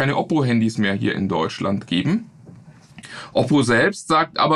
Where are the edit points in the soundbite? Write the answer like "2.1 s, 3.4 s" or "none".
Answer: none